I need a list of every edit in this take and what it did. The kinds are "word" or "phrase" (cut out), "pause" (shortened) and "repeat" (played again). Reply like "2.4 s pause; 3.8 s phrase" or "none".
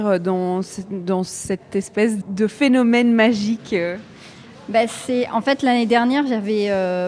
2.2 s word